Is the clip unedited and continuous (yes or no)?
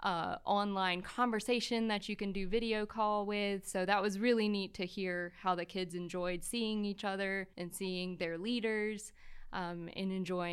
no